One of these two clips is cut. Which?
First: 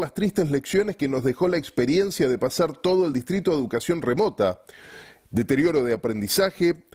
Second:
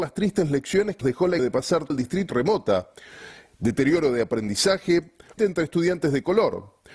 second; 5 cuts; at 1.0 s, 1.4 s, 1.9 s, 2.3 s, 5.4 s

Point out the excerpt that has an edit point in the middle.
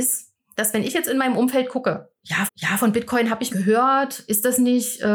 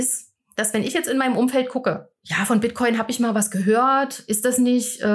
first; 2 cuts; at 2.5 s, 3.5 s

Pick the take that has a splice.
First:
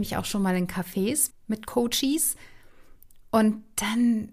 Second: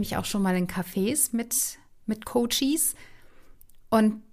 first; 1 cut; at 1.3 s

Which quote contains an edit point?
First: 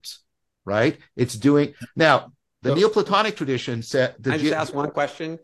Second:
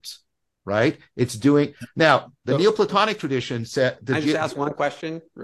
second; 1 cut; at 2.4 s

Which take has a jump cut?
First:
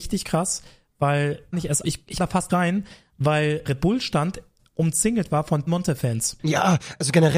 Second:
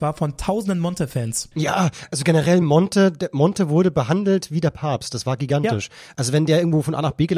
first; 6 cuts; at 1.5 s, 1.8 s, 2.2 s, 2.5 s, 3.6 s, 5.7 s

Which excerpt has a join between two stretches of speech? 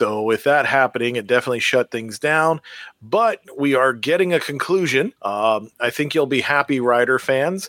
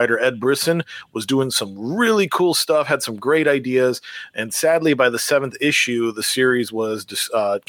first; 1 cut; at 5.2 s

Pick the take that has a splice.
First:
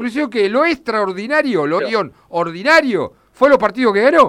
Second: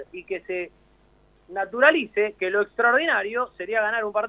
first; 1 cut; at 1.8 s

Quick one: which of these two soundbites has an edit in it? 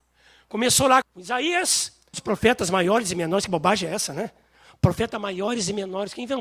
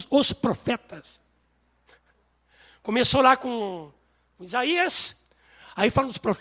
first; 2 cuts; at 1.0 s, 2.1 s

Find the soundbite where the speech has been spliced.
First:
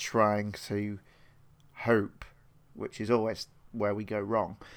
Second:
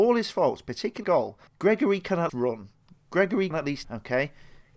second; 5 cuts; at 1.0 s, 1.5 s, 2.3 s, 3.5 s, 3.8 s

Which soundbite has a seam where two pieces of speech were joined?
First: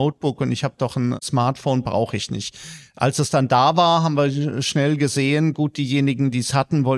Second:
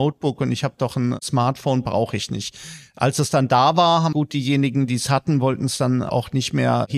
second; 1 cut; at 4.1 s

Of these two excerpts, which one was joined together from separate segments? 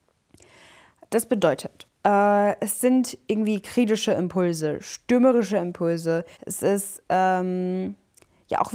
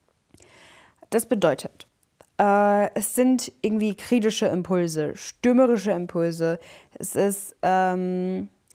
first; 2 cuts; at 1.9 s, 6.3 s

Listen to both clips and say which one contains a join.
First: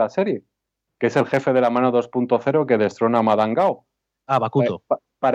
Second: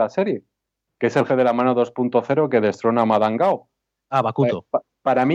second; 1 cut; at 1.3 s

